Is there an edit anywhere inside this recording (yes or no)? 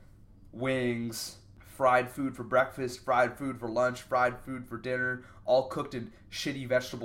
no